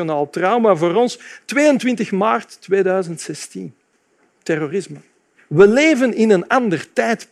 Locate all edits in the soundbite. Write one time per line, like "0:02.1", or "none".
none